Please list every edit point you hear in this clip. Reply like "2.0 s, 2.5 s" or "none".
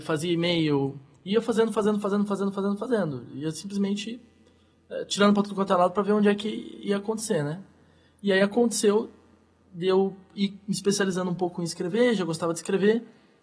none